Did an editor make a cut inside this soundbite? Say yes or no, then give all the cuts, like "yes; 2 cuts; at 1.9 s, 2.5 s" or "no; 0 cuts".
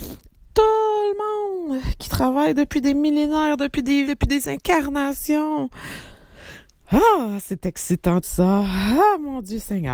yes; 2 cuts; at 4.1 s, 8.2 s